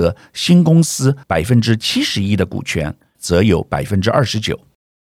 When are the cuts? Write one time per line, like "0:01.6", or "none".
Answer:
0:01.2
0:03.1